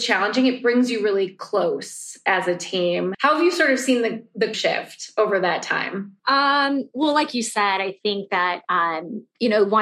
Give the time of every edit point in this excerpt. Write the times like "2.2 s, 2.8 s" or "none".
3.1 s, 4.5 s, 6.2 s